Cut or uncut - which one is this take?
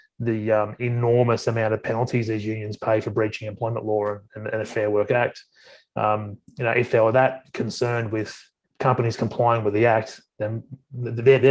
uncut